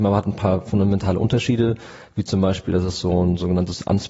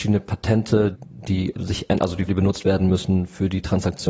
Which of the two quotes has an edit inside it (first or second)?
second